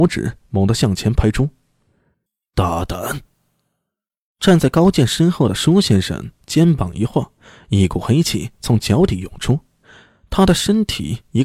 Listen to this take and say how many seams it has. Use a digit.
0